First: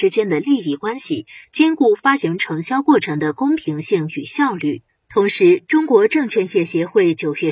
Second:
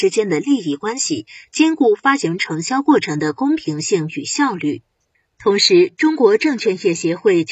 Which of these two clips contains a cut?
first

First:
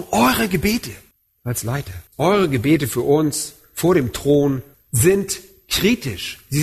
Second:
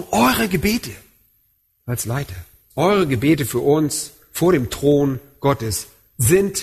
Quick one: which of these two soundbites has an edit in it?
first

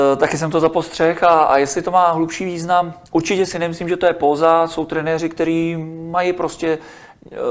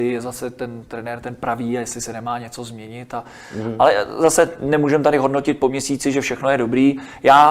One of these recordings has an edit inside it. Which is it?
first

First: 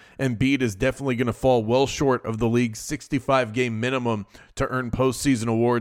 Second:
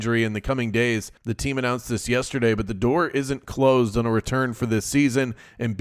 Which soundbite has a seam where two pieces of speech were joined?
second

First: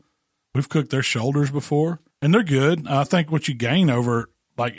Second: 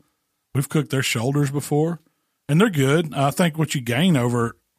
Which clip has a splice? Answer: first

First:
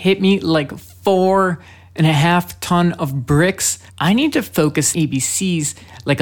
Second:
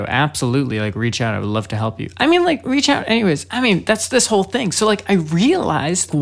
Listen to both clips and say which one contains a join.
first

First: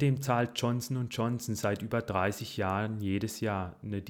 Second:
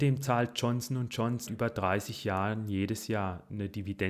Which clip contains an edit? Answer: second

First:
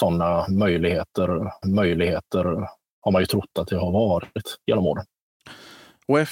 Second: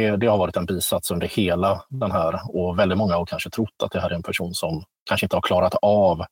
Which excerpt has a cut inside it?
first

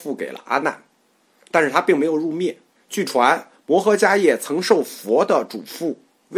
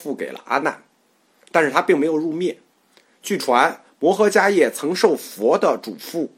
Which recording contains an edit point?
first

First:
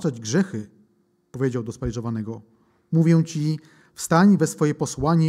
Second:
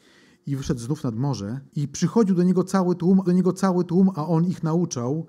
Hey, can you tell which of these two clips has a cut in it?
second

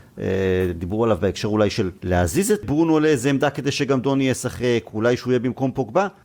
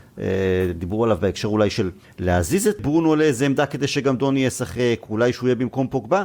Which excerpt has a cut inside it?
first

